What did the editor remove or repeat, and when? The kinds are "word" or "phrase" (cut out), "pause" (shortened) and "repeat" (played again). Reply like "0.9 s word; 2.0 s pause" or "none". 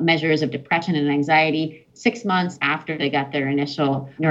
none